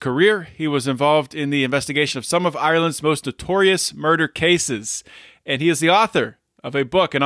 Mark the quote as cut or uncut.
uncut